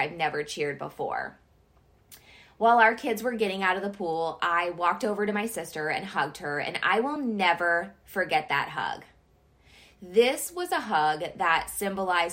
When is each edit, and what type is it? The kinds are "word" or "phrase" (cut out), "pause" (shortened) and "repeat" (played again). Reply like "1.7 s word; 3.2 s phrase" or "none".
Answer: none